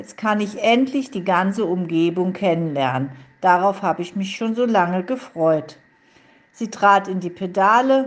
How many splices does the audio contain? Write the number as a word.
zero